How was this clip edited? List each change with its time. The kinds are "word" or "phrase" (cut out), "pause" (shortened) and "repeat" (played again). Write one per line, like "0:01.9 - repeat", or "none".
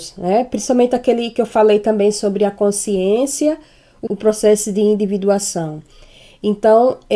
0:04.1 - phrase